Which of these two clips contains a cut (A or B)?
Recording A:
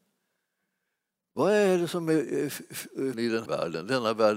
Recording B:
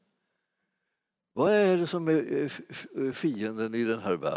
A